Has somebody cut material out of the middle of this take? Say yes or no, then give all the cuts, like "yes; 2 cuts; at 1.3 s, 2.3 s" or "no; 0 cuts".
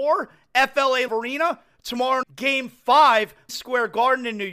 yes; 3 cuts; at 1.1 s, 2.2 s, 3.5 s